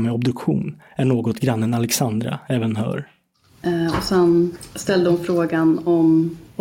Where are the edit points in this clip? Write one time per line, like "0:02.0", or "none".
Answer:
none